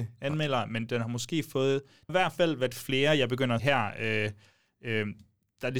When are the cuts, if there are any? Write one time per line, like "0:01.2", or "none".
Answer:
0:02.1
0:03.6

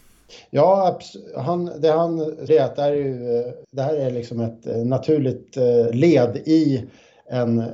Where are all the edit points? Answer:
0:02.5
0:03.6

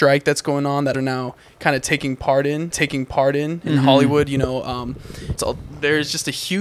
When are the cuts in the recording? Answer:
0:00.9
0:02.7
0:05.4

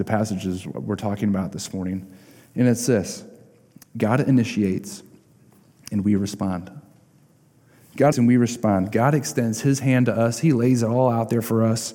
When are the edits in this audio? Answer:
0:08.1

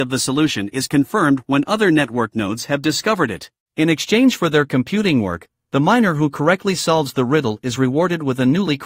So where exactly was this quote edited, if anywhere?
none

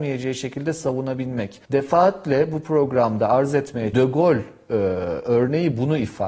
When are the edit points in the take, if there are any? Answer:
0:01.6
0:03.9

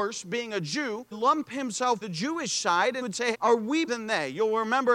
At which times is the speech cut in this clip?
0:01.1
0:02.0
0:03.0
0:03.3
0:03.9

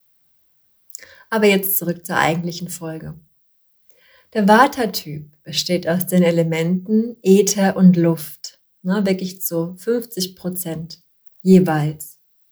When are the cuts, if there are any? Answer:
none

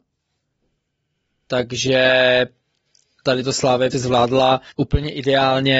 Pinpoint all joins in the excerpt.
0:03.9
0:04.7

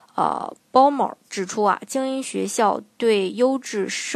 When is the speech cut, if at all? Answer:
0:01.2

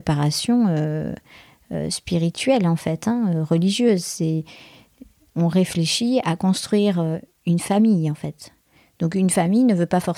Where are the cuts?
none

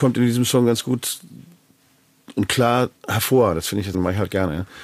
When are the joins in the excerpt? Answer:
0:03.0
0:03.9

